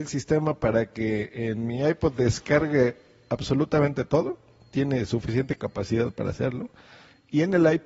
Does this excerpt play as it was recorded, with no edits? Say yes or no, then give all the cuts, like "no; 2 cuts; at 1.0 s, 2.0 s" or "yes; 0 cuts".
yes; 0 cuts